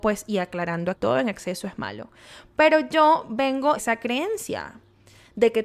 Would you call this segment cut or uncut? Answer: cut